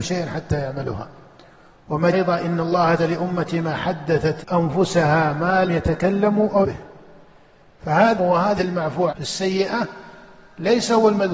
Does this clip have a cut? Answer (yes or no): yes